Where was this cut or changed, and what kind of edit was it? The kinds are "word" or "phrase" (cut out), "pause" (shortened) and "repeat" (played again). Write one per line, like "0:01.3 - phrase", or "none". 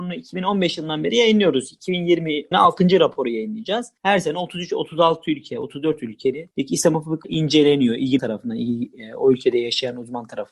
0:02.5 - phrase
0:07.2 - word
0:08.2 - word